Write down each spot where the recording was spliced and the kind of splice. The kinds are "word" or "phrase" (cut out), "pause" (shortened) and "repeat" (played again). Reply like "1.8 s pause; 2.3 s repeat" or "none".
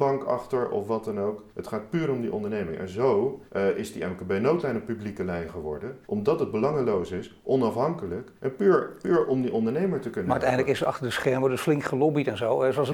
1.5 s pause; 3.5 s pause; 6.0 s pause; 8.4 s pause